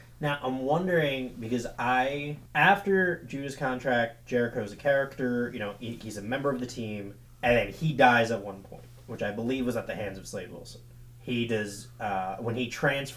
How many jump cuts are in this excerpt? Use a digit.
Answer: 3